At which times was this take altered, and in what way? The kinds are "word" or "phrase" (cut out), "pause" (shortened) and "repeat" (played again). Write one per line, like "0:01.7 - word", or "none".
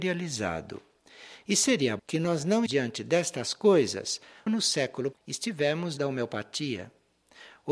0:02.0 - word
0:02.7 - word
0:04.5 - word
0:05.1 - word
0:06.0 - word

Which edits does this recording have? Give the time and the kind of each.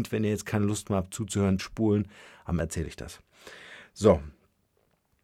0:01.6 - word
0:02.6 - word

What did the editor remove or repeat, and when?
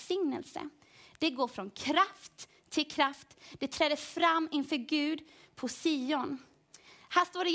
none

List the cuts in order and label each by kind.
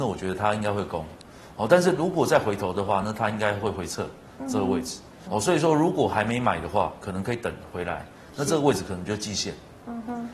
0:05.3 - word

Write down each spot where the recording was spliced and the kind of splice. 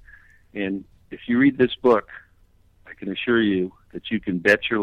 none

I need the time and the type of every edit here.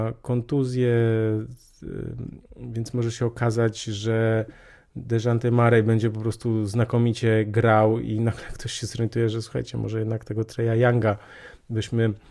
none

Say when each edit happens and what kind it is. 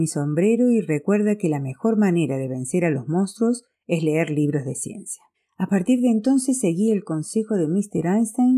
0:05.3 - pause

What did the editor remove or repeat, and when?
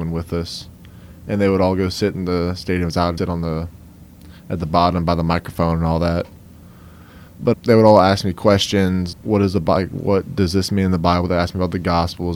0:03.2 - word
0:07.5 - word
0:09.1 - word

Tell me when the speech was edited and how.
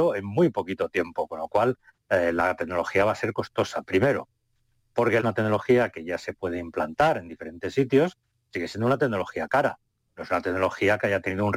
0:05.2 - phrase

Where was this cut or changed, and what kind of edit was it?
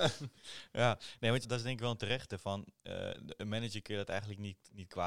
0:01.4 - phrase

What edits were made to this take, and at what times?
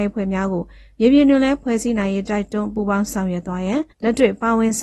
0:03.9 - pause

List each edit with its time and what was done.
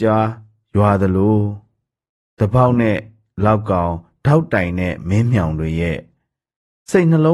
none

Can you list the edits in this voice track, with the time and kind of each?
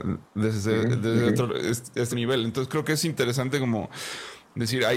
0:02.1 - word

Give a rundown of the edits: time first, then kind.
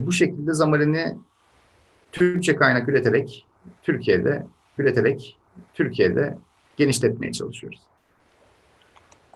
0:04.8 - repeat

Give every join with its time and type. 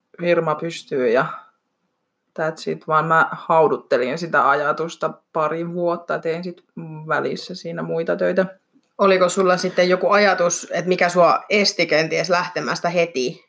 0:06.2 - word

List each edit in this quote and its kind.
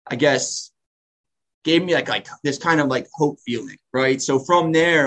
none

